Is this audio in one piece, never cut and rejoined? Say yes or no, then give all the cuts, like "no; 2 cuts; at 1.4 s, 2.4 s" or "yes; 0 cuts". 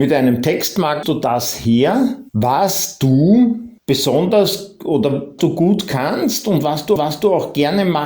no; 5 cuts; at 1.0 s, 2.3 s, 3.8 s, 5.4 s, 7.0 s